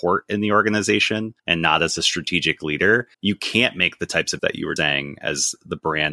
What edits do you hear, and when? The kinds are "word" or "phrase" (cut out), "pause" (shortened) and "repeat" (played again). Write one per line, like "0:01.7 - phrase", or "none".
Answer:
0:01.4 - pause
0:03.1 - pause
0:04.4 - word
0:04.8 - word